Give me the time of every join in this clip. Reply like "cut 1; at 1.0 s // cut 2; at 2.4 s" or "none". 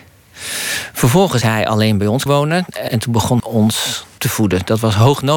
cut 1; at 1.4 s // cut 2; at 2.3 s // cut 3; at 2.9 s // cut 4; at 3.4 s // cut 5; at 4.2 s